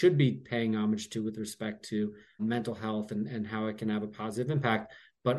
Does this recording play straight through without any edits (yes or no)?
no